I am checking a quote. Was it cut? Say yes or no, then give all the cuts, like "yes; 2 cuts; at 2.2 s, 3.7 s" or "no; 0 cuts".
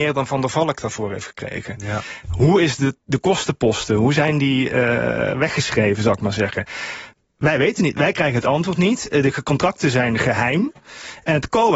no; 0 cuts